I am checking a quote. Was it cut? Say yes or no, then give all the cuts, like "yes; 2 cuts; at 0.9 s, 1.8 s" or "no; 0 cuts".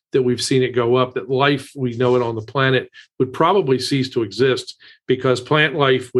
no; 0 cuts